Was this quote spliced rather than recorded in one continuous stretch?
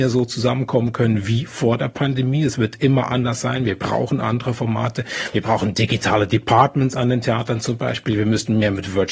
no; 0 cuts

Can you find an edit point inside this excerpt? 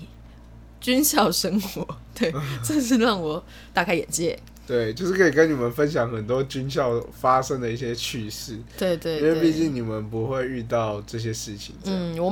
no; 0 cuts

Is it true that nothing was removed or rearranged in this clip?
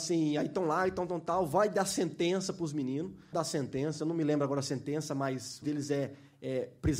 no; 2 cuts; at 3.3 s, 5.6 s

